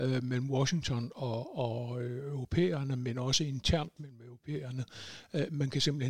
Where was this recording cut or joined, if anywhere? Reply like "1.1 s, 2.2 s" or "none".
none